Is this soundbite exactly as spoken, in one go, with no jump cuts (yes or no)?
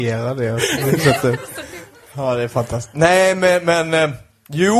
yes